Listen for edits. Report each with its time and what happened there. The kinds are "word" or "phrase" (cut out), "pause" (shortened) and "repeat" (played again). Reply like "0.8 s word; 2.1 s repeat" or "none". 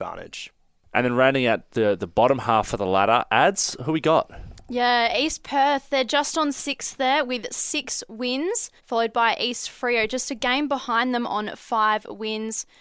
8.8 s pause